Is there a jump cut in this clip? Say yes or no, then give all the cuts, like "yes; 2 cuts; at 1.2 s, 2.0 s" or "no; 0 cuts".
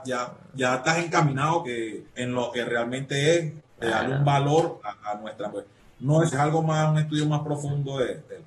yes; 6 cuts; at 1.6 s, 2.1 s, 2.5 s, 4.8 s, 5.5 s, 6.3 s